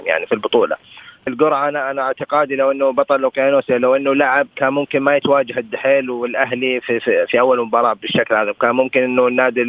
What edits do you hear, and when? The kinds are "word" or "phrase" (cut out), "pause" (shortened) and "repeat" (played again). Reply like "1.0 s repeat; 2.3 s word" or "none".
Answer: 4.5 s pause